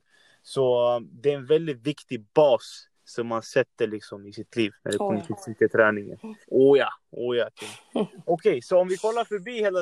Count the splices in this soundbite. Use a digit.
3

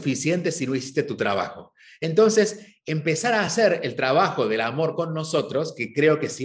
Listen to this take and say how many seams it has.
0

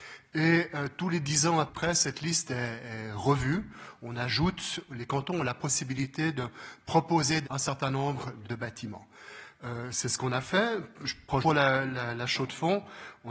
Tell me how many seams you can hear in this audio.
4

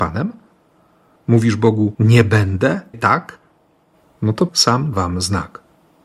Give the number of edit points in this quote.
4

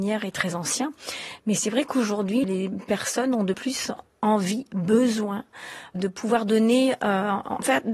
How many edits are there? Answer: 3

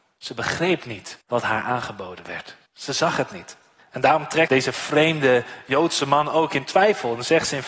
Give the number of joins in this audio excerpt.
4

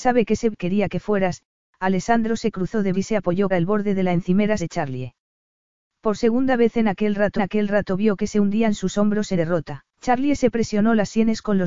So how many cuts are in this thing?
6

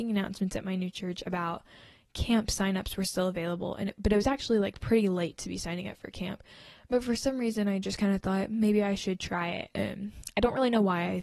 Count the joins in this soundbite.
0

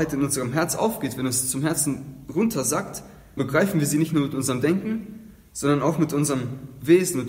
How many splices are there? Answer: 1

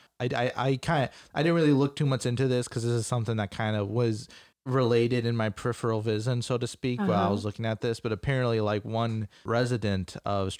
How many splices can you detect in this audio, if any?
1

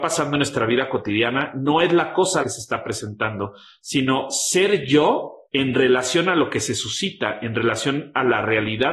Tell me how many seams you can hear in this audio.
2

